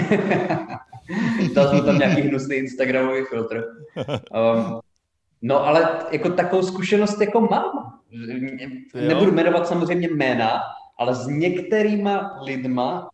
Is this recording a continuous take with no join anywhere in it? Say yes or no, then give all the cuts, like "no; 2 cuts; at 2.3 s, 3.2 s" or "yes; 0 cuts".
yes; 0 cuts